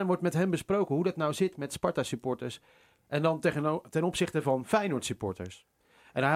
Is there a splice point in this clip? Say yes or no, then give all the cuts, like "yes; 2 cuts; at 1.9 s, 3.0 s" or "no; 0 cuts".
no; 0 cuts